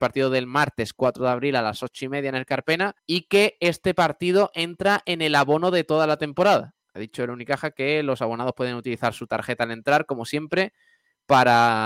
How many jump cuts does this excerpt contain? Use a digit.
2